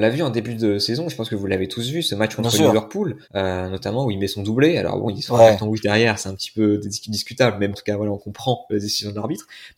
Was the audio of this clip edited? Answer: yes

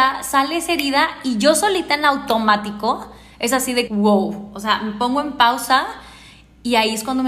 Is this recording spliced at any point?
yes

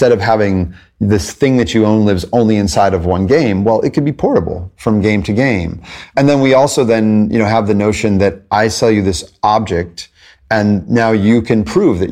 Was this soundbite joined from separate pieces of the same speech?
no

